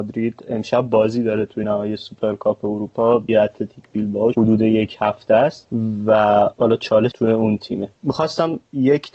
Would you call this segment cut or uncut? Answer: cut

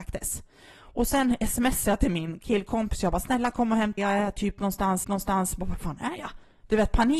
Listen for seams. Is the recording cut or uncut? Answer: cut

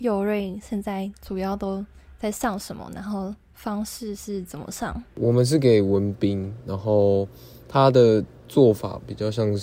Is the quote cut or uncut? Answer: uncut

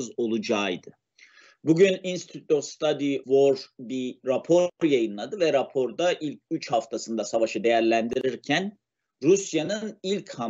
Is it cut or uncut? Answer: cut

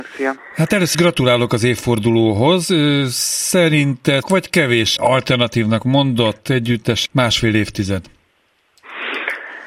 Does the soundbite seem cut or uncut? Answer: cut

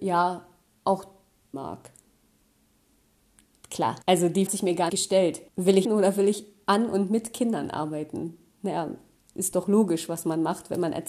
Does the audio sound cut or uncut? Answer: cut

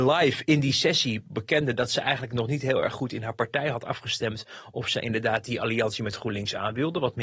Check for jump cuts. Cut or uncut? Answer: uncut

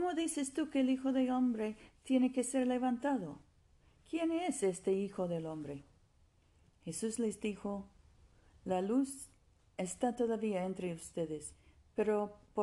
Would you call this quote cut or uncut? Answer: uncut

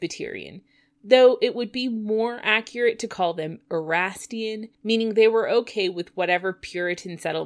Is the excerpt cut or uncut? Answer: cut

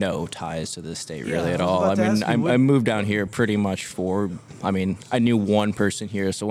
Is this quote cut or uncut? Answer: uncut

